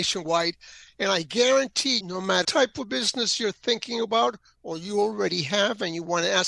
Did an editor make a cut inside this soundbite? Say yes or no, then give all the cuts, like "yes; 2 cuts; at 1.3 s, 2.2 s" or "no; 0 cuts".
yes; 2 cuts; at 2.0 s, 2.4 s